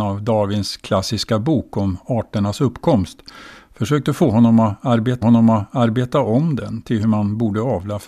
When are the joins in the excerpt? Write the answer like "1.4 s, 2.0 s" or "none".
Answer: 5.2 s